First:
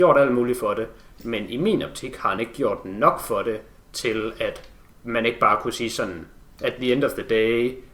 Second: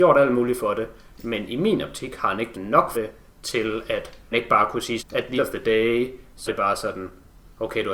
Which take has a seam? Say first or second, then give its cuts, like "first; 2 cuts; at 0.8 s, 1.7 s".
second; 6 cuts; at 2.5 s, 2.9 s, 4.3 s, 5.0 s, 5.4 s, 6.5 s